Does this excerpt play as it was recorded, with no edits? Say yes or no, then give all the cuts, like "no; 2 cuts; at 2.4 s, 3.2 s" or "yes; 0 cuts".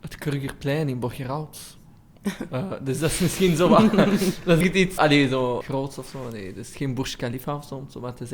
no; 3 cuts; at 4.6 s, 5.0 s, 5.6 s